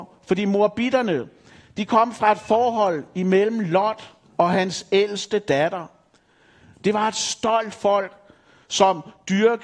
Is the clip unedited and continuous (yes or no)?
yes